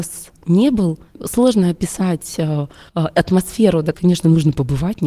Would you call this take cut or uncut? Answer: cut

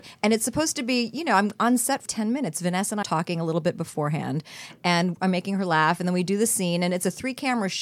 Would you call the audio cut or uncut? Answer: cut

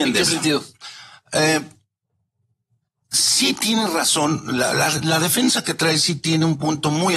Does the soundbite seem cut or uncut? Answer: uncut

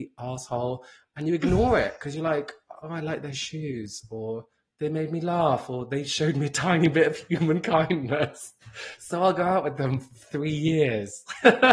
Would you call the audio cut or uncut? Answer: uncut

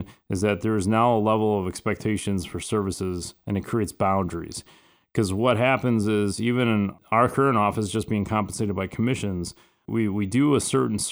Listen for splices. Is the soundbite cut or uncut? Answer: uncut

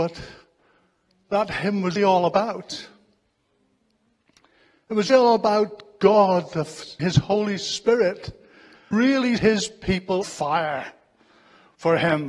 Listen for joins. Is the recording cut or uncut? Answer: cut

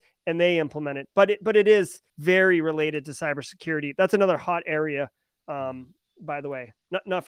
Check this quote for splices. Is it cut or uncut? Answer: cut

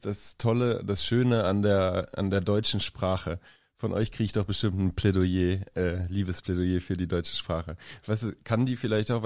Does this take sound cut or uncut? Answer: uncut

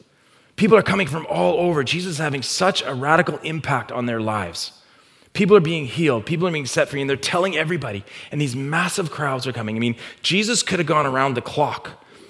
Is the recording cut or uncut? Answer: uncut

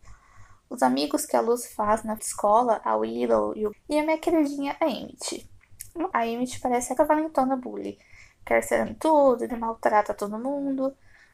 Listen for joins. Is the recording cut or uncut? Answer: cut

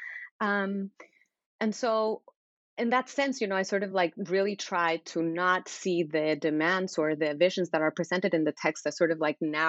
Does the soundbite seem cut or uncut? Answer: uncut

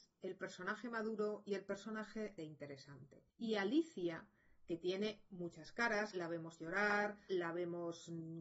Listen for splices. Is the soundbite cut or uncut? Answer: cut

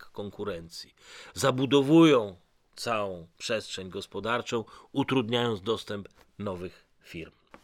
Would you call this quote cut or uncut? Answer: uncut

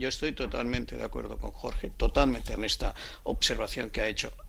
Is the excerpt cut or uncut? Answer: cut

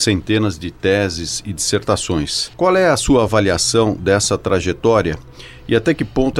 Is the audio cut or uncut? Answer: uncut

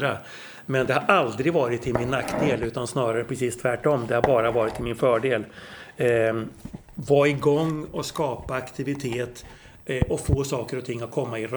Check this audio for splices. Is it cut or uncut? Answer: uncut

